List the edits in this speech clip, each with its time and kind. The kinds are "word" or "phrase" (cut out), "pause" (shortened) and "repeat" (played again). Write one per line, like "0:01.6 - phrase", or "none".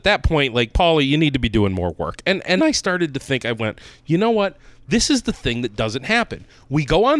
0:02.6 - word